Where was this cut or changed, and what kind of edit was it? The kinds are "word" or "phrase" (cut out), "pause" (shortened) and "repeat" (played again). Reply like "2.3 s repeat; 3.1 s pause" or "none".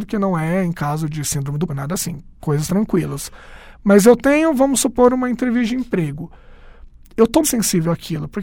1.7 s word; 2.7 s word; 7.4 s word